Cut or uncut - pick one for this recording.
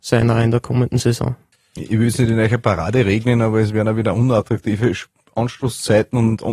uncut